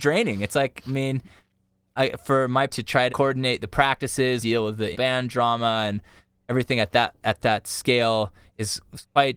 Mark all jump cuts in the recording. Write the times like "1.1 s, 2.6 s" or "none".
2.7 s, 3.1 s, 4.4 s, 4.9 s